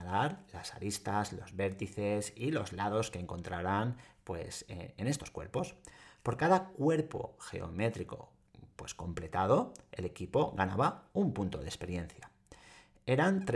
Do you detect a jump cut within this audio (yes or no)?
no